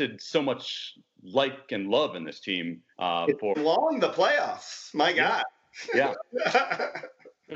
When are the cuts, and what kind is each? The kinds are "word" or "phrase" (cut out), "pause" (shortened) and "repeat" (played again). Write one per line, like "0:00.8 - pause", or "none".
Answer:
0:02.9 - pause
0:03.5 - phrase